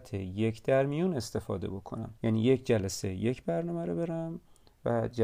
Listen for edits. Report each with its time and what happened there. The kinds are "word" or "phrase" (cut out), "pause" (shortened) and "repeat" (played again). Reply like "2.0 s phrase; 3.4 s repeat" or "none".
2.2 s pause